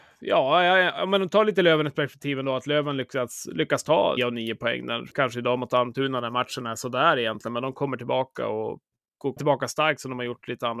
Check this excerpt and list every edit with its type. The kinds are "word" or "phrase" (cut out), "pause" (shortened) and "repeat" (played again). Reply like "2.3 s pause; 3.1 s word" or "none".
4.2 s word; 5.1 s pause; 9.4 s word